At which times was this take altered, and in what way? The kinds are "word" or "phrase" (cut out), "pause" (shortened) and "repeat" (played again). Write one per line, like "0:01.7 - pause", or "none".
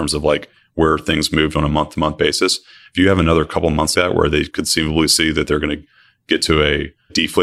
0:03.9 - word